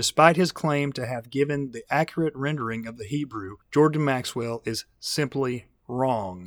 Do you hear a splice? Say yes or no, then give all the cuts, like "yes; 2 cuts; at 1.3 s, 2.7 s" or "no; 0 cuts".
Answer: yes; 1 cut; at 3.6 s